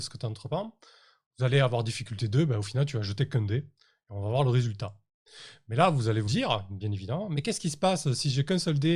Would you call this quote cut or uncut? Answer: cut